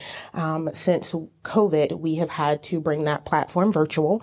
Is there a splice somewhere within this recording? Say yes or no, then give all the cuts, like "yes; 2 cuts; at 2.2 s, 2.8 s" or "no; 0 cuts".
no; 0 cuts